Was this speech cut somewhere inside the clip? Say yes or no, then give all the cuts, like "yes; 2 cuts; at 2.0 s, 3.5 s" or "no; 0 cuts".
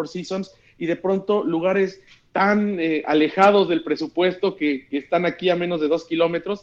no; 0 cuts